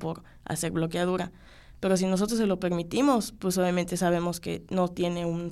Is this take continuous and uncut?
yes; 0 cuts

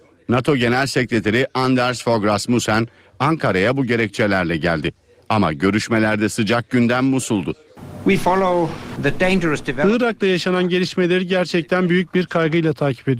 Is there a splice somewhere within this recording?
no; 0 cuts

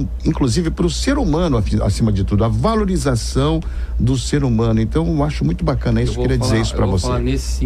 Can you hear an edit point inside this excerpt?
no; 0 cuts

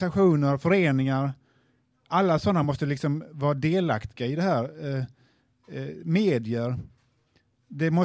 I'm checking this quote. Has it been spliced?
no; 0 cuts

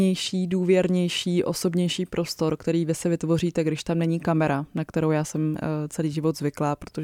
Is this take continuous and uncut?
yes; 0 cuts

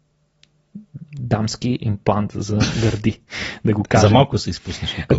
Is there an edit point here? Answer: no; 0 cuts

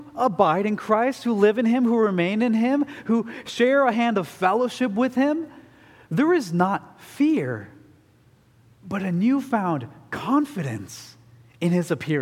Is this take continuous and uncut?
yes; 0 cuts

